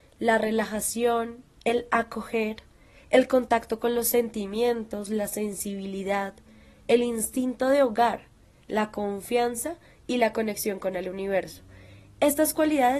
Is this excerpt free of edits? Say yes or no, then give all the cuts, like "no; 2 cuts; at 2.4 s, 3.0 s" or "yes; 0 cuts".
yes; 0 cuts